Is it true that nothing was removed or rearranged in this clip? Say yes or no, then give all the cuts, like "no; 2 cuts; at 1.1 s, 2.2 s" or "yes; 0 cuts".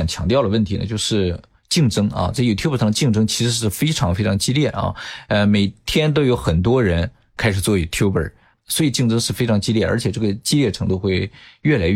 yes; 0 cuts